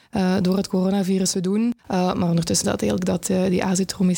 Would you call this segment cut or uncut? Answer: cut